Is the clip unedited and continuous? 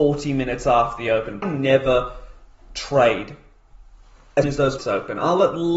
no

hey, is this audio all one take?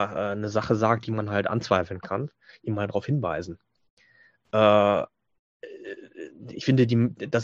yes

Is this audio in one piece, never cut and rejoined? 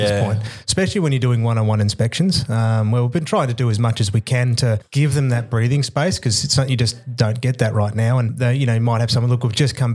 yes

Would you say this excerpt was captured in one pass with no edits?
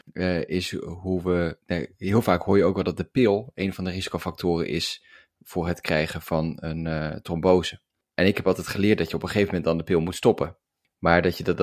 yes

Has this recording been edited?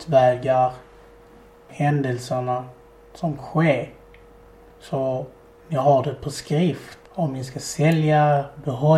yes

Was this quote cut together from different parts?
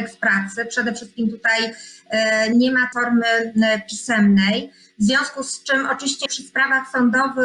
yes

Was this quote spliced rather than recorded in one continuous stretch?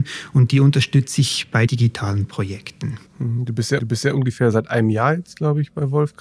yes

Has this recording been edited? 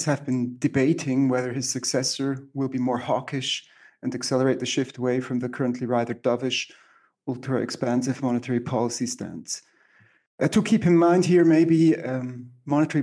no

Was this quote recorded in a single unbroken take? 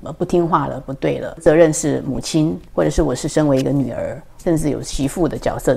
no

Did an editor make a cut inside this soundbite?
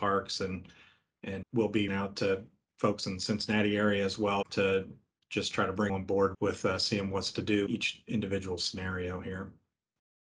yes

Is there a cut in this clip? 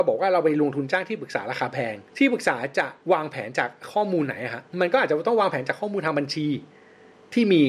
yes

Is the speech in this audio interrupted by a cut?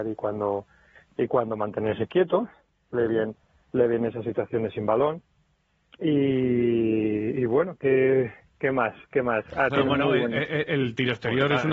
no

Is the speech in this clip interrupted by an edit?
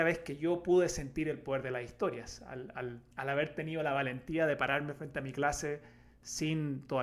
yes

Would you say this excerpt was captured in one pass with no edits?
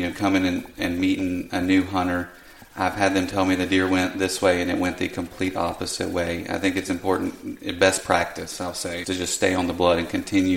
no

